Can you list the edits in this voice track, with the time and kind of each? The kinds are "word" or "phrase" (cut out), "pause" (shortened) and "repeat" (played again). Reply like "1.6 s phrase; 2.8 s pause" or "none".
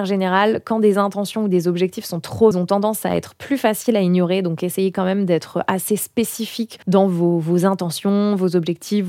2.5 s phrase; 6.8 s pause